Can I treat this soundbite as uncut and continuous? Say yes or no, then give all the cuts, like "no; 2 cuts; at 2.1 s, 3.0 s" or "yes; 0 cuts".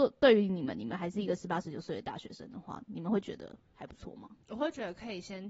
no; 1 cut; at 4.4 s